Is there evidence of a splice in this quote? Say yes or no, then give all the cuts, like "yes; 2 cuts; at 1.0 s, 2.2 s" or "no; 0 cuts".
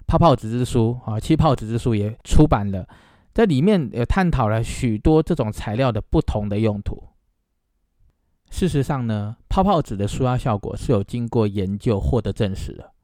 no; 0 cuts